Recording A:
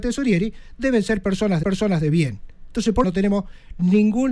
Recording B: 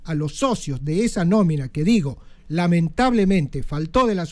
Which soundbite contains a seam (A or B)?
A